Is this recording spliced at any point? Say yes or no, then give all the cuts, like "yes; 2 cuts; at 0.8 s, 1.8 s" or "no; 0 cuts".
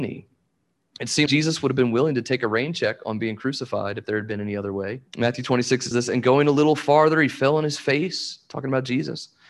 yes; 3 cuts; at 1.3 s, 5.1 s, 5.9 s